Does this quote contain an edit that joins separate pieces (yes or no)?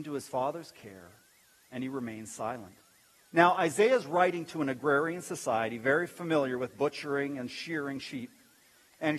yes